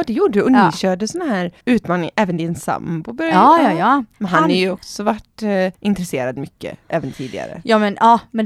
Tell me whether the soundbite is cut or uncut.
cut